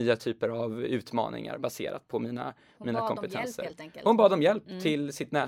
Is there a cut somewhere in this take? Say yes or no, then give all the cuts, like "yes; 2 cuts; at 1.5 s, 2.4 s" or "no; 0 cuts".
no; 0 cuts